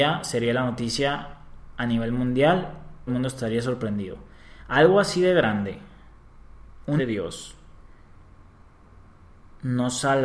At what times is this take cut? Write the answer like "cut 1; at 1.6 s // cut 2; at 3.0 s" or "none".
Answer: cut 1; at 3.1 s // cut 2; at 7.0 s